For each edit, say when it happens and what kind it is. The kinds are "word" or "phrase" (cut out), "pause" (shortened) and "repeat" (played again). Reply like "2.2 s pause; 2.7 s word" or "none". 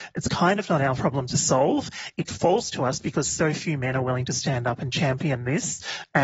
none